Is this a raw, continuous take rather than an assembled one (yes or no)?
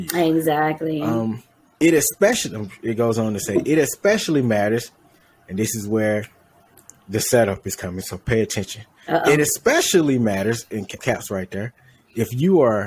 no